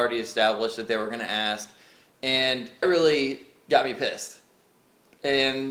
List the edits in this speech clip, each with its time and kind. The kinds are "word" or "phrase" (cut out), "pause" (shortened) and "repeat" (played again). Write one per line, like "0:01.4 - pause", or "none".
0:02.8 - word